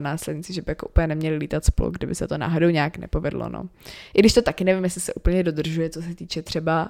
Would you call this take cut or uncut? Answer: uncut